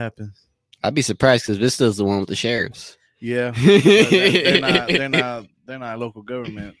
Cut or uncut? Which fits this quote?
uncut